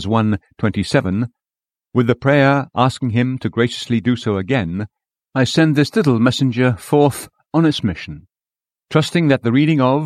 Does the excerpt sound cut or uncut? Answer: uncut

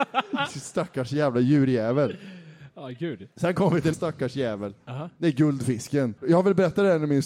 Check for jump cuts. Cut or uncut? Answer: cut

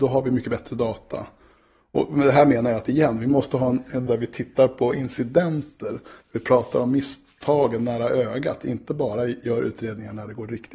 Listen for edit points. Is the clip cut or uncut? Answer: cut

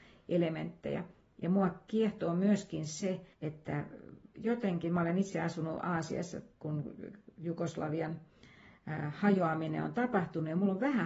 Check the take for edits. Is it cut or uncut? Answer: cut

